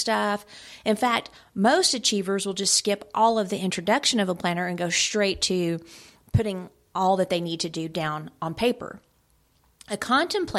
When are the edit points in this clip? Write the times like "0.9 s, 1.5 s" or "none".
none